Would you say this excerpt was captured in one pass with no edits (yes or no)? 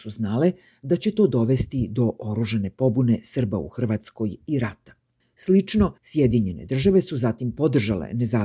no